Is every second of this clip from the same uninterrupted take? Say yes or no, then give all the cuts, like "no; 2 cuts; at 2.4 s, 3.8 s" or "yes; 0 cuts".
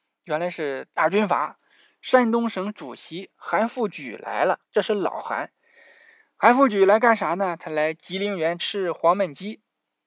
no; 1 cut; at 4.6 s